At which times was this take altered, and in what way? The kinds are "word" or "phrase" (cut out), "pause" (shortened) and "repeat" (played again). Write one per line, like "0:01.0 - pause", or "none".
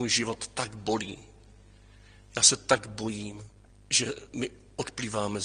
none